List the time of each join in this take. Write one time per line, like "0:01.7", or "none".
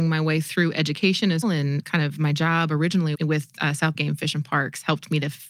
0:01.4
0:01.8
0:03.1
0:03.9